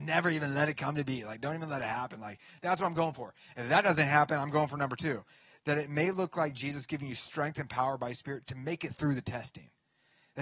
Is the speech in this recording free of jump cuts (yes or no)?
yes